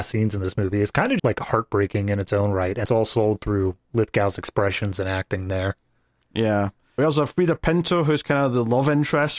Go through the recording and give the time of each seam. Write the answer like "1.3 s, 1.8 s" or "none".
1.2 s, 2.8 s, 7.0 s